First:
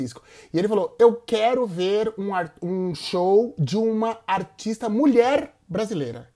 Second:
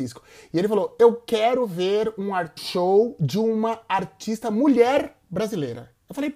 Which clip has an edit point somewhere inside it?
second; 1 cut; at 2.6 s

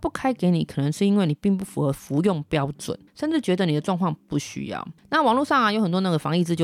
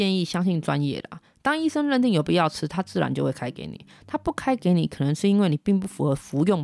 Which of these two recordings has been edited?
first; 1 cut; at 3.1 s

